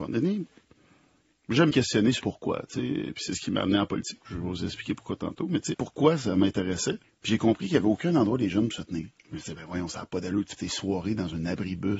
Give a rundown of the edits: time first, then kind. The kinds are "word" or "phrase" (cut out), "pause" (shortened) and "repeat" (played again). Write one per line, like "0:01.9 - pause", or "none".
0:01.7 - phrase
0:02.2 - word
0:05.7 - word
0:07.0 - pause
0:09.2 - pause
0:10.6 - word